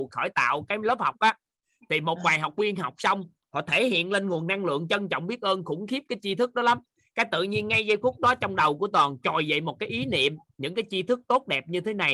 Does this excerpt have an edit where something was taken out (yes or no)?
no